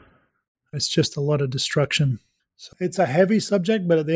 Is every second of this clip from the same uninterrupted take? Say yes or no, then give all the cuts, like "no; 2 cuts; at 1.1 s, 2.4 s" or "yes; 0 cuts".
no; 1 cut; at 2.7 s